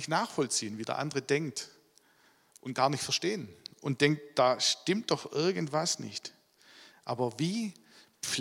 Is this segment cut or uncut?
uncut